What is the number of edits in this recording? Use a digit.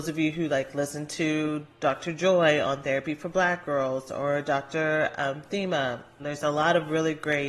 1